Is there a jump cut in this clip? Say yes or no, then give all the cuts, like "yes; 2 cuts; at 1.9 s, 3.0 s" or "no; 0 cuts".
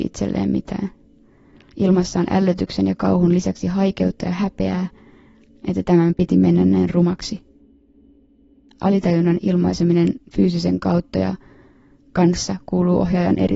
no; 0 cuts